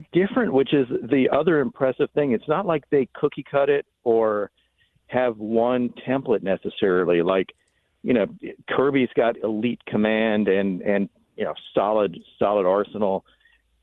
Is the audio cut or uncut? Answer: cut